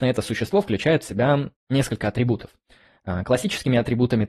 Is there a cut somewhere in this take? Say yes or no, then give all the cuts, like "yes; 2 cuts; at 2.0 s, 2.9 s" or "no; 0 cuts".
yes; 1 cut; at 1.6 s